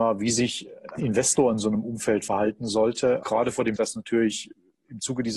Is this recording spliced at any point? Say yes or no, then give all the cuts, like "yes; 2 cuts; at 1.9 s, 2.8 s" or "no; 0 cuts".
yes; 3 cuts; at 1.0 s, 3.2 s, 3.8 s